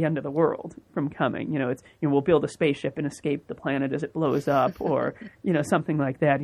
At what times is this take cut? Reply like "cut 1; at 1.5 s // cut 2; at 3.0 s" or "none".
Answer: none